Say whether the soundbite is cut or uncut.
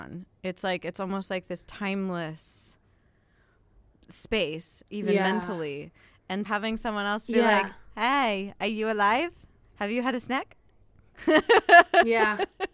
cut